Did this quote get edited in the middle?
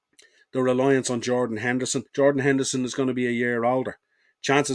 yes; 1 cut; at 2.1 s

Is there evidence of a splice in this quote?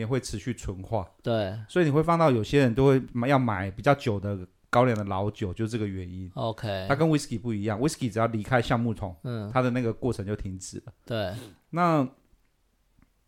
no; 0 cuts

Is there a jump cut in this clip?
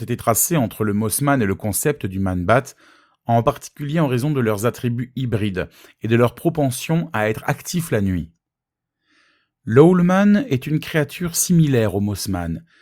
no; 0 cuts

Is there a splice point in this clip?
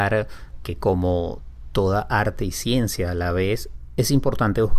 no; 0 cuts

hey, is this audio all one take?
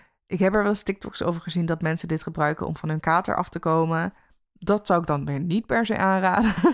yes; 0 cuts

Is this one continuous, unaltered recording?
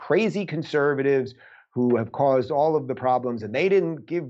yes; 0 cuts

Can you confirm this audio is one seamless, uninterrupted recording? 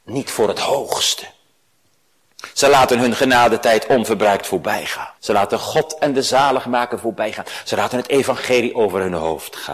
no; 1 cut; at 5.2 s

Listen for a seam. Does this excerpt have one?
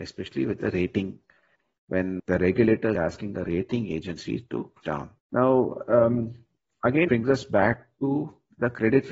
yes; 5 cuts; at 2.2 s, 2.9 s, 4.8 s, 5.2 s, 7.1 s

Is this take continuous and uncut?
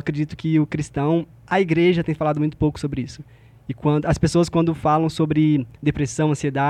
yes; 0 cuts

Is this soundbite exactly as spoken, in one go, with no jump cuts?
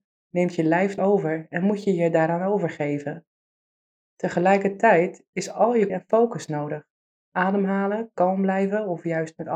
no; 2 cuts; at 1.0 s, 5.9 s

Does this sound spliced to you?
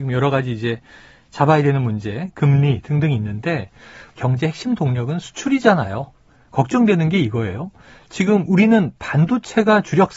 yes; 1 cut; at 4.1 s

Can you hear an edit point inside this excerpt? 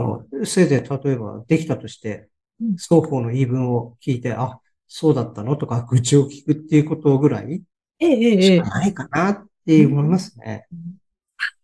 no; 0 cuts

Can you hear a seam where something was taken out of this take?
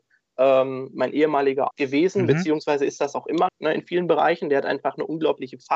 yes; 2 cuts; at 1.7 s, 3.5 s

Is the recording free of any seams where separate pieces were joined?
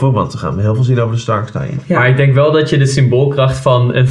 yes; 0 cuts

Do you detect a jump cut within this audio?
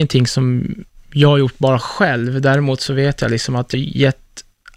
yes; 1 cut; at 3.7 s

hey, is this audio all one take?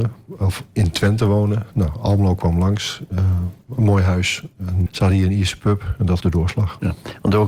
no; 2 cuts; at 4.9 s, 6.2 s

